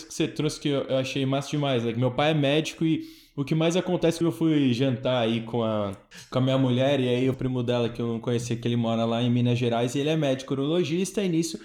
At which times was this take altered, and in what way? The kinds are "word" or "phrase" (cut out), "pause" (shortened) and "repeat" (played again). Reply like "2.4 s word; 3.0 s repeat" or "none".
4.2 s word; 7.3 s phrase